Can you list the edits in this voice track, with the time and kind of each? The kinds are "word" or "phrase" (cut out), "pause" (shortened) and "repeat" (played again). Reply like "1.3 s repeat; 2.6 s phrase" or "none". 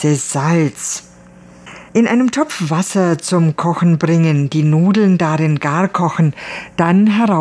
1.9 s pause